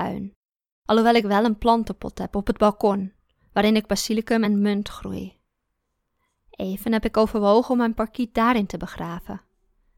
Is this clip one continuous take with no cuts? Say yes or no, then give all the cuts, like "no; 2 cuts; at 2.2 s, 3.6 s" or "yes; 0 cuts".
yes; 0 cuts